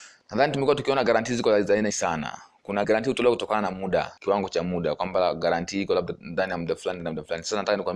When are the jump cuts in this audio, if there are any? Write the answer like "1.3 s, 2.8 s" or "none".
1.9 s, 2.8 s, 4.2 s